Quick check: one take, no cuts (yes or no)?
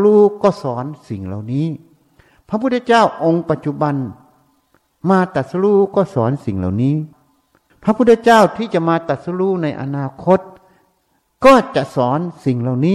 yes